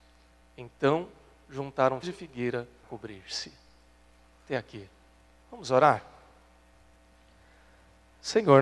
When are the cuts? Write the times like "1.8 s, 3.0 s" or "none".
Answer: 2.0 s, 2.8 s